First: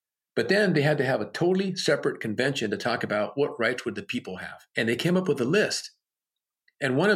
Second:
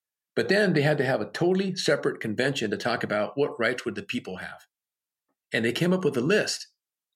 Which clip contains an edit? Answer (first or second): first